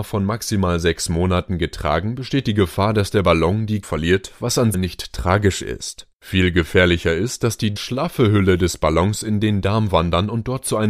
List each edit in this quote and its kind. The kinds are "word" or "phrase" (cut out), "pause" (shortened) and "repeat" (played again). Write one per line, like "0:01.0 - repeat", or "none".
0:03.8 - word
0:04.7 - phrase
0:06.1 - pause
0:07.8 - word

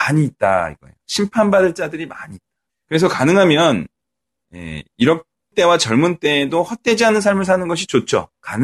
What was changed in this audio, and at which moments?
0:01.0 - pause
0:02.7 - pause
0:05.5 - word

